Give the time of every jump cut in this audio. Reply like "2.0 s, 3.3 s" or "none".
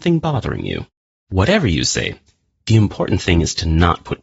none